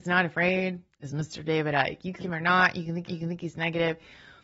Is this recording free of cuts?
no; 2 cuts; at 2.2 s, 3.1 s

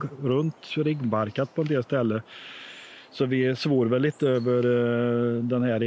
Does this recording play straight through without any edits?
yes; 0 cuts

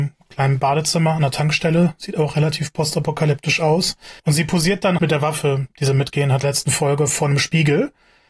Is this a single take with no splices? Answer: no; 3 cuts; at 4.2 s, 5.0 s, 6.4 s

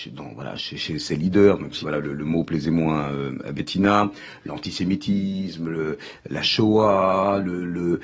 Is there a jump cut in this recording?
yes; 1 cut; at 1.8 s

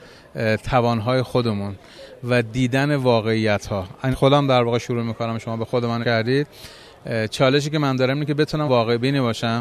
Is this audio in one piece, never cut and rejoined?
no; 3 cuts; at 4.1 s, 6.0 s, 8.7 s

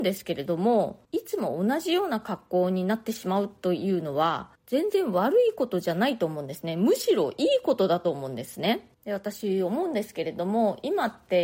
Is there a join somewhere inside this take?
yes; 3 cuts; at 1.0 s, 4.6 s, 8.9 s

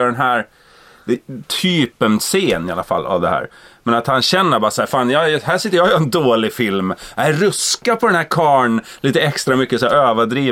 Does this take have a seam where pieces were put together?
no; 0 cuts

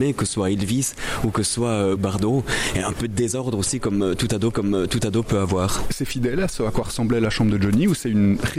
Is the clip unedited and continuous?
no; 2 cuts; at 2.0 s, 4.5 s

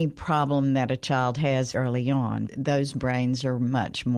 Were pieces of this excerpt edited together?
yes; 2 cuts; at 1.7 s, 2.5 s

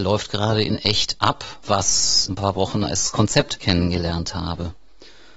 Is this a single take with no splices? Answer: no; 1 cut; at 2.3 s

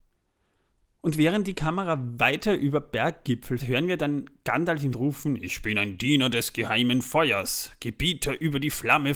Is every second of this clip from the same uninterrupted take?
no; 2 cuts; at 3.6 s, 4.9 s

